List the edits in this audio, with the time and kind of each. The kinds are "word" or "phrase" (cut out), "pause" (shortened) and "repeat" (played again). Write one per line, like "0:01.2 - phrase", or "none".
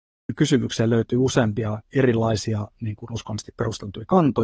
none